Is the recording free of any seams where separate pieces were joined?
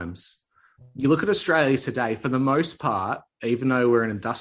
yes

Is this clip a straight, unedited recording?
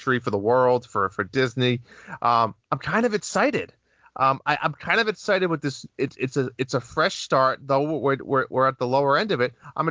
yes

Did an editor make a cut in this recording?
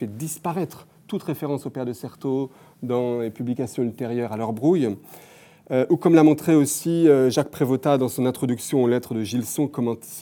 no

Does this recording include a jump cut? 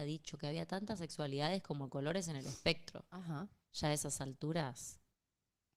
no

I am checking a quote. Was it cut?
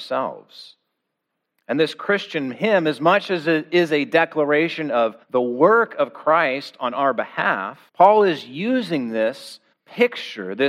yes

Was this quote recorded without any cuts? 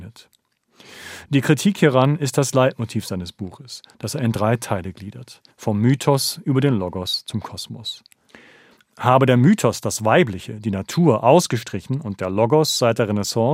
no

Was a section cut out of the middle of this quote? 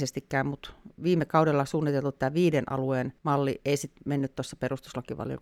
yes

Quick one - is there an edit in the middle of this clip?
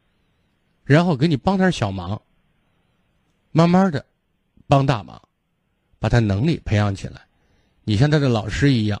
no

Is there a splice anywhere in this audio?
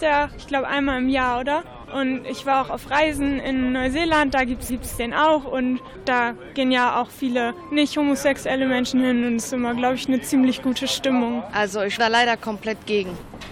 yes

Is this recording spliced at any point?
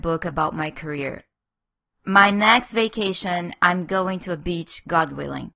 no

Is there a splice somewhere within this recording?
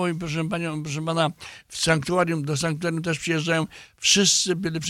no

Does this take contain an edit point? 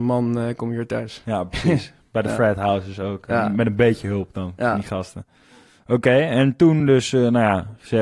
no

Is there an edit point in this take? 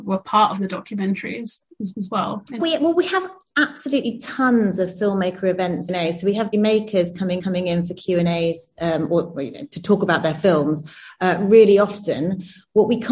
yes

